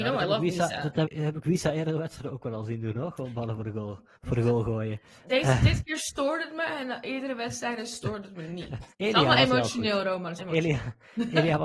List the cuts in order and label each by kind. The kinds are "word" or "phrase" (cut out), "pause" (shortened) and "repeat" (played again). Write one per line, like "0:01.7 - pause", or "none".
0:01.0 - word
0:04.2 - pause
0:08.9 - pause
0:10.4 - word